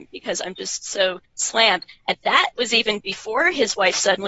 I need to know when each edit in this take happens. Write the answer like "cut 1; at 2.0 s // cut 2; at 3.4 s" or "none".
cut 1; at 1.2 s // cut 2; at 2.5 s